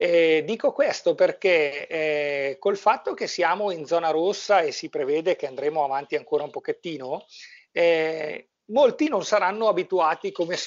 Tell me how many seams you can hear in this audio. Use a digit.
1